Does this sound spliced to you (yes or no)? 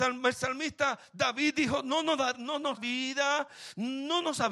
yes